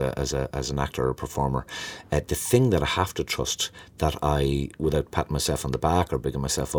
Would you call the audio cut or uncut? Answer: uncut